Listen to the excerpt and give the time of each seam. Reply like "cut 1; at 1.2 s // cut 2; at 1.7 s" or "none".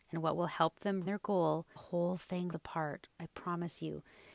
cut 1; at 1.1 s // cut 2; at 1.8 s // cut 3; at 2.5 s